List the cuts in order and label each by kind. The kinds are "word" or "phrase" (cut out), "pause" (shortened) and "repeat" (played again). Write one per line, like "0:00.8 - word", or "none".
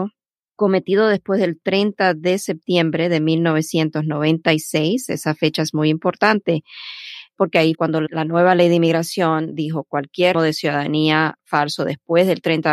0:07.7 - word
0:10.3 - word